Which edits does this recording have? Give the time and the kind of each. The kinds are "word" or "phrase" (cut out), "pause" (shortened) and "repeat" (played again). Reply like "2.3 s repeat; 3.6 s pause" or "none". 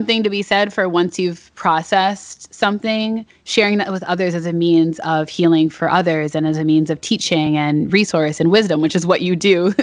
none